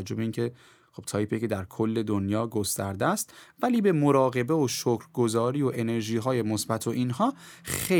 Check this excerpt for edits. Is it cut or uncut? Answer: uncut